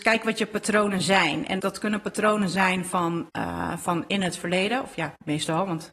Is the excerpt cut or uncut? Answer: cut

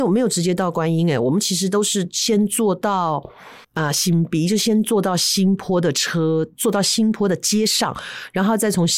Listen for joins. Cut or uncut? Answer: cut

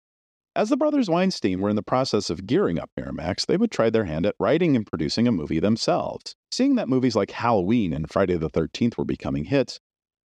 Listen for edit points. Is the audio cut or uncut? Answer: cut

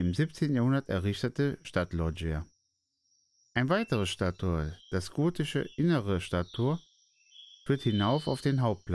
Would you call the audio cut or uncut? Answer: uncut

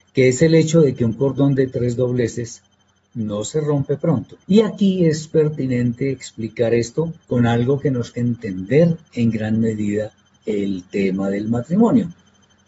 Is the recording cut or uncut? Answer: cut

